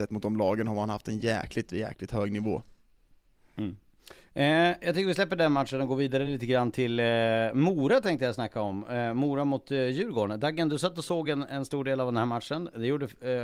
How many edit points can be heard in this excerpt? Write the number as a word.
zero